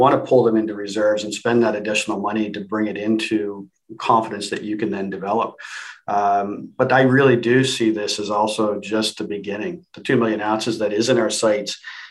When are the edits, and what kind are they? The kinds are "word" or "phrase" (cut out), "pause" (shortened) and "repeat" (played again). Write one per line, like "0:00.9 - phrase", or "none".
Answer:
none